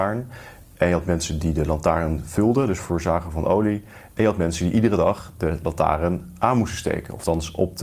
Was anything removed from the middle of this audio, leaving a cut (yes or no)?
no